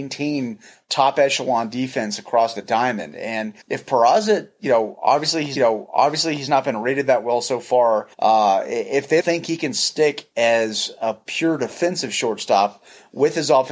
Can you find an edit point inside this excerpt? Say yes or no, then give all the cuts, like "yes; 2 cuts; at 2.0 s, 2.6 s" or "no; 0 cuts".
yes; 4 cuts; at 3.6 s, 5.6 s, 8.1 s, 9.2 s